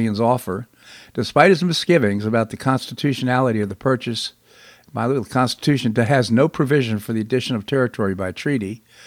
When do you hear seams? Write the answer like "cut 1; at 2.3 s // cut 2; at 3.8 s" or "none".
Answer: none